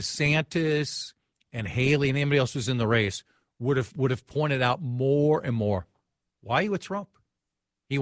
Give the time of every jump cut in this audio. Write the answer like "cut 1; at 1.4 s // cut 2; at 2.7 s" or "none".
none